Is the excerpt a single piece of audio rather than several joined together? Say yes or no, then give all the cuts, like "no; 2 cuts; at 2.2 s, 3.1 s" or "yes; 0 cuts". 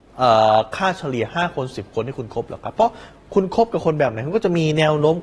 yes; 0 cuts